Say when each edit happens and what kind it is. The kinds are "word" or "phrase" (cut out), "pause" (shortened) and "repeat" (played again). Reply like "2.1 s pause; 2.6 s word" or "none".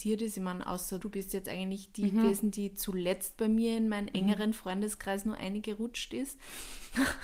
1.0 s word